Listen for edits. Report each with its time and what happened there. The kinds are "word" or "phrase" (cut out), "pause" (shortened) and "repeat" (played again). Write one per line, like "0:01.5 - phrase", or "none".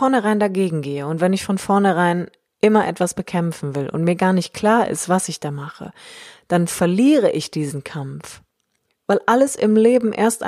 none